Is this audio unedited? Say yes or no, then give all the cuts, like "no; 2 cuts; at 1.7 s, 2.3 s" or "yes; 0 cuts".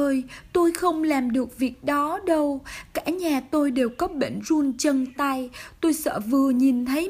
yes; 0 cuts